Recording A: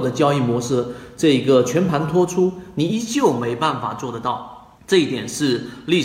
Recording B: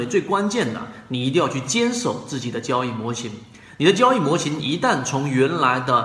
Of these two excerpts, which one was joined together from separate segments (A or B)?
A